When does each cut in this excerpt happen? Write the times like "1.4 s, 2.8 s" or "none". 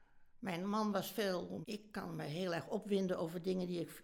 1.6 s

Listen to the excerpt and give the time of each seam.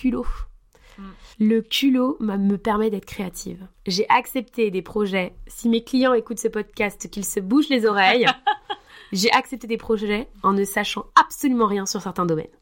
1.3 s, 3.7 s

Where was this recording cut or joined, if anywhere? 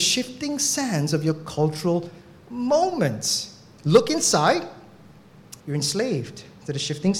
5.6 s

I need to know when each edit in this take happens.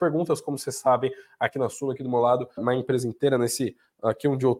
2.6 s

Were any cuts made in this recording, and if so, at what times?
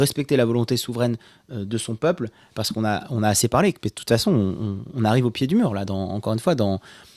none

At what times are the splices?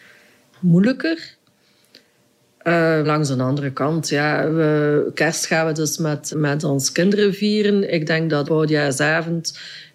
3.0 s, 6.3 s, 8.5 s

